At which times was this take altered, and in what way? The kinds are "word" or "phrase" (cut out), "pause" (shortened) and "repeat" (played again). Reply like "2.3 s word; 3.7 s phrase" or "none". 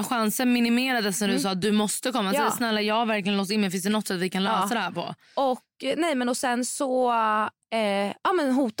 none